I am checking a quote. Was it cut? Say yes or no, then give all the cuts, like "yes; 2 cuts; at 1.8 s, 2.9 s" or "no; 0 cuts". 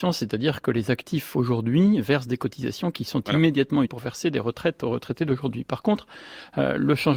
yes; 1 cut; at 3.8 s